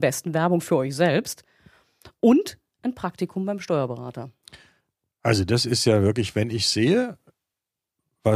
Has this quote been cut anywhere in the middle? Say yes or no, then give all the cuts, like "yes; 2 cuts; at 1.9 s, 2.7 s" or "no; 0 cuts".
no; 0 cuts